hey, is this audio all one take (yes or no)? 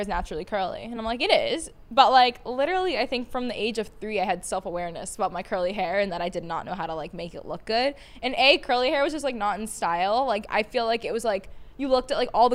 yes